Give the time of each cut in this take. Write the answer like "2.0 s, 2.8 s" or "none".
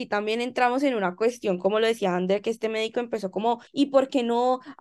3.7 s